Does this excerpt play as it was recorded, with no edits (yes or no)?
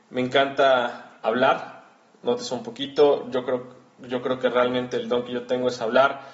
yes